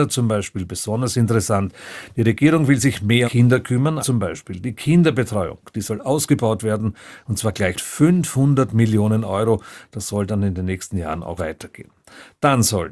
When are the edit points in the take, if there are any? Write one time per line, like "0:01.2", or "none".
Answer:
0:03.2
0:04.0
0:07.7
0:11.4

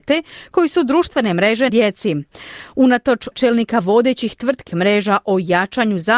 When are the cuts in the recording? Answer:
0:01.7
0:03.3
0:04.7

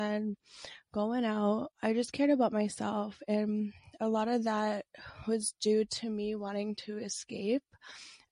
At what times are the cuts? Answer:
0:01.7

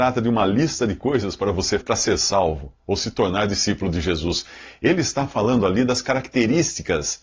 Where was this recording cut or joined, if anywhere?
0:01.8

